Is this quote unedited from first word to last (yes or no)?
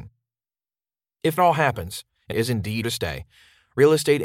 no